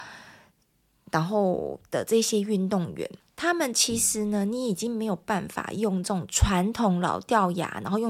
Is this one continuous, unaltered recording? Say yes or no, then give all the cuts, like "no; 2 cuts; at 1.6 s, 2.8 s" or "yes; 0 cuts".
no; 1 cut; at 3.2 s